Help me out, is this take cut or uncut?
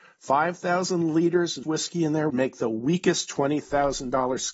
cut